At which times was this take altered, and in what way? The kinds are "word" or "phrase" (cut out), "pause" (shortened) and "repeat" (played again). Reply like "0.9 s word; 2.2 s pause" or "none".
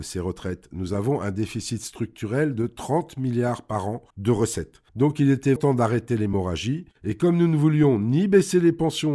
4.1 s pause; 4.9 s pause; 5.6 s word; 7.0 s pause